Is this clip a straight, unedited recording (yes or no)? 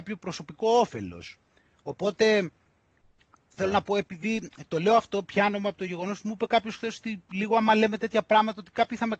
yes